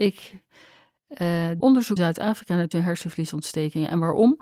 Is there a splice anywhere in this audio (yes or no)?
yes